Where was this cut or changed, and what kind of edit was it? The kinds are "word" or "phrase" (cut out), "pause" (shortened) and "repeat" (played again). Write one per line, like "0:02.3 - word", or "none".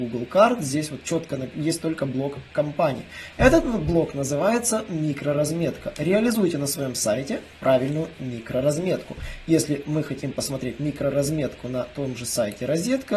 none

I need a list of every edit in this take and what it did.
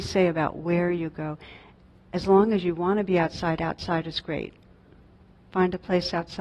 none

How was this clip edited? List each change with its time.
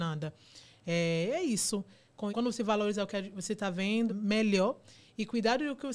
0:02.3 - word
0:04.1 - word

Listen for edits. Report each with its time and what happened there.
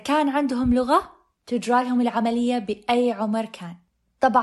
none

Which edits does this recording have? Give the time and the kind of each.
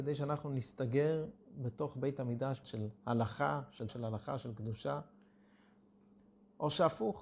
0:02.6 - phrase
0:03.0 - pause
0:03.9 - word

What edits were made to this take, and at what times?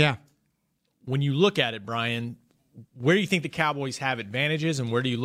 0:02.9 - pause

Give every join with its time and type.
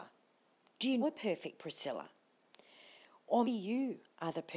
0:01.0 - word
0:03.4 - word

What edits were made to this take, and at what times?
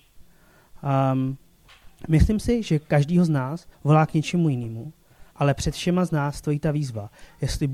0:02.0 - pause
0:03.7 - pause
0:05.3 - pause

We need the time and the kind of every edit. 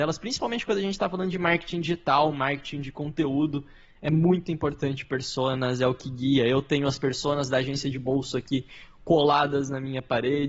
none

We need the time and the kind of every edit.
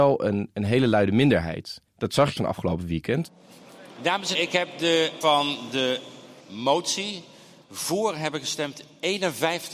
0:01.9 - pause
0:02.4 - phrase
0:04.3 - word
0:05.2 - word
0:06.4 - pause

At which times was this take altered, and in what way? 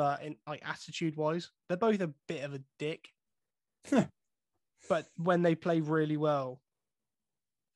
none

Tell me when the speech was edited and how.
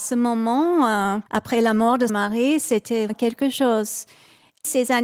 0:01.3 - pause
0:02.1 - word
0:03.1 - word

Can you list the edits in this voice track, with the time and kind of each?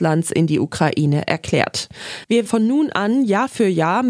0:02.5 - word

